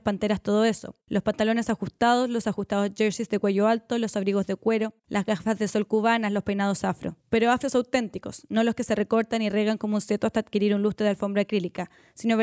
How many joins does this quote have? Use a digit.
3